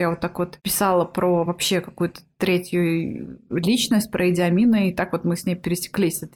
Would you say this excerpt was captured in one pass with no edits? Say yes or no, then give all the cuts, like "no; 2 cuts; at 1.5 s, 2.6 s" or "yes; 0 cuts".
yes; 0 cuts